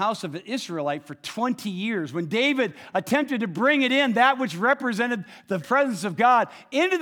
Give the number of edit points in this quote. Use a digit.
1